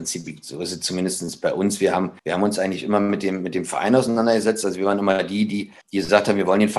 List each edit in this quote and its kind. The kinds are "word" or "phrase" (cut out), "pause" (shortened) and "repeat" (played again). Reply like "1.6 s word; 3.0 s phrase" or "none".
2.2 s pause; 5.8 s pause

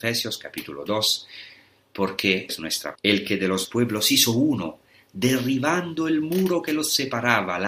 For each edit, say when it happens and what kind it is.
2.5 s word; 3.0 s word; 3.6 s word

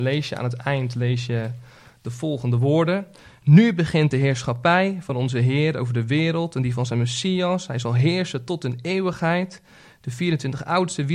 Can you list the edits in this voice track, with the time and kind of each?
none

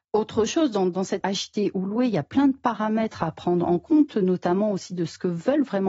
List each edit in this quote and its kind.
1.2 s word

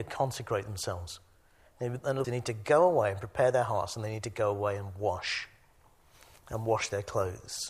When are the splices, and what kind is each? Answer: 2.2 s word

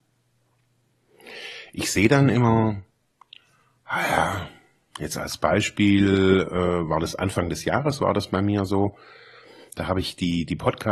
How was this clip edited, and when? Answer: none

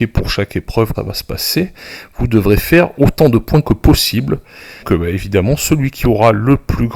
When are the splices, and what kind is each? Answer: 0.9 s phrase; 4.8 s word

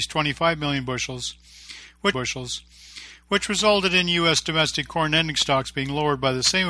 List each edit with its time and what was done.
2.1 s repeat

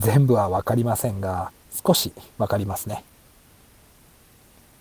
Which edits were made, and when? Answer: 2.3 s pause

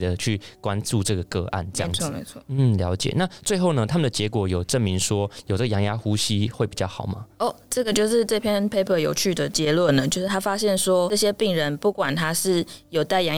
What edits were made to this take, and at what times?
7.3 s pause

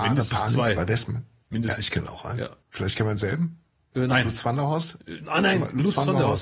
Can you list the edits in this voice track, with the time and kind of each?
2.6 s pause

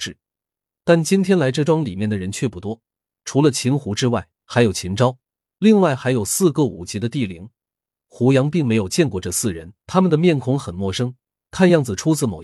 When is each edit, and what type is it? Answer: 4.3 s pause; 9.8 s pause

